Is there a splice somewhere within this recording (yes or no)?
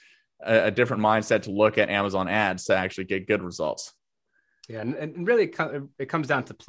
no